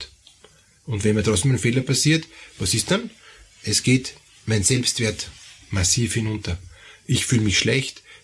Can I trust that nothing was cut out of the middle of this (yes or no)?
yes